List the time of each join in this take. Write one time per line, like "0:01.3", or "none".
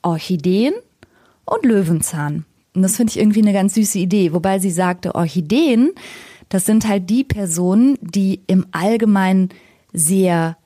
none